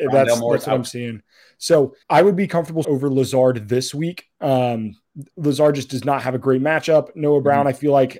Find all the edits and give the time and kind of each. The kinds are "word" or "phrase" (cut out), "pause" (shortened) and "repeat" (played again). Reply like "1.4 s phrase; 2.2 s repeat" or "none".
2.0 s pause; 2.8 s phrase

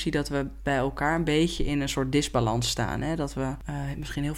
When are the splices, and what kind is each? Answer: none

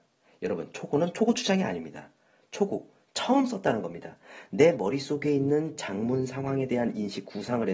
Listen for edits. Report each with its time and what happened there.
none

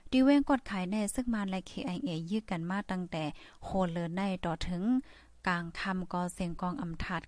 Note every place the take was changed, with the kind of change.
none

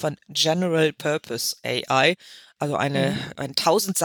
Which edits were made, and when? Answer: none

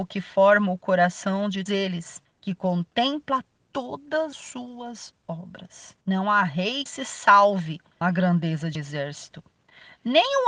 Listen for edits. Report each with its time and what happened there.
1.7 s word; 2.2 s pause; 4.3 s word; 6.0 s pause; 6.9 s word; 8.0 s word; 8.8 s word

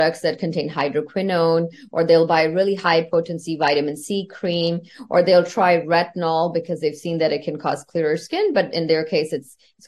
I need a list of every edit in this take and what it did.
none

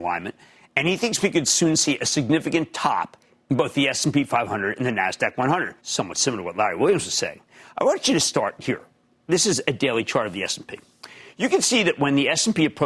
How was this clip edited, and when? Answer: 5.8 s pause

